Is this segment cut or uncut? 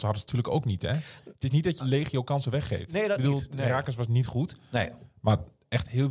cut